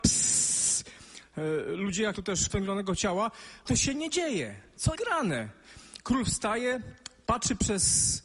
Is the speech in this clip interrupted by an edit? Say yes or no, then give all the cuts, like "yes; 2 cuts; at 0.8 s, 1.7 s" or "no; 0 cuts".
yes; 4 cuts; at 2.1 s, 2.5 s, 3.7 s, 5.0 s